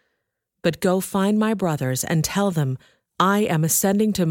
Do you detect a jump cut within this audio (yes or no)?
no